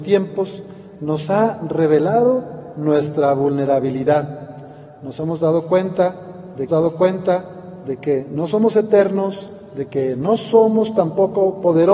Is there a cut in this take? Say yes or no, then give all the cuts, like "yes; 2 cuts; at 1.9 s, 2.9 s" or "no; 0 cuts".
yes; 1 cut; at 6.7 s